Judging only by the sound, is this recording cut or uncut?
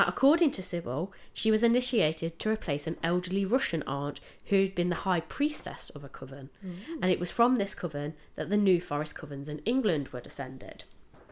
uncut